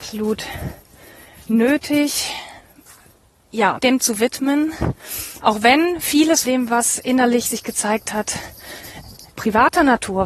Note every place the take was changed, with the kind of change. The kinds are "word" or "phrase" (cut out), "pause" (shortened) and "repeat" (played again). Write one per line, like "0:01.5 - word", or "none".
0:03.8 - word
0:06.4 - word
0:09.3 - word